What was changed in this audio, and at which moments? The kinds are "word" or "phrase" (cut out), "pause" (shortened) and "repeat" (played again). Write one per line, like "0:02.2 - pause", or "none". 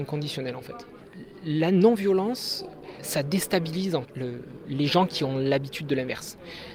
0:04.0 - word